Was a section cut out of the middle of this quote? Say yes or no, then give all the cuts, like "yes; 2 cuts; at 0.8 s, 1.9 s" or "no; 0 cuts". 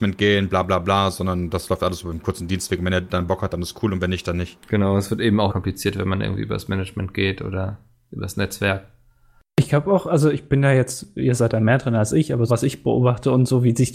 yes; 2 cuts; at 5.5 s, 12.5 s